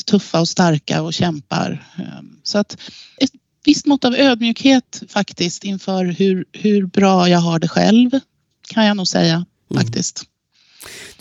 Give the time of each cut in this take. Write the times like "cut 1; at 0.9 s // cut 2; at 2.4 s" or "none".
none